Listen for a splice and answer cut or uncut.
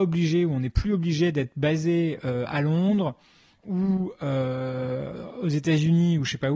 uncut